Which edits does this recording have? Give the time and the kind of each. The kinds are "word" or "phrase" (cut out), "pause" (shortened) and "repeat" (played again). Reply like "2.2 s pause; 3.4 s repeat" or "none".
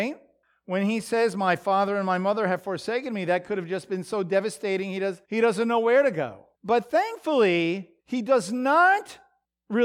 5.2 s pause; 6.5 s pause; 8.0 s pause